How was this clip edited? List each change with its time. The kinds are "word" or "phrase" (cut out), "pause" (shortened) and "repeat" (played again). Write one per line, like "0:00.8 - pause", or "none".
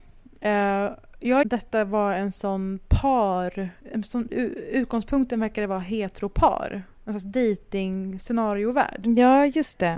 0:01.4 - phrase
0:03.8 - pause
0:07.0 - pause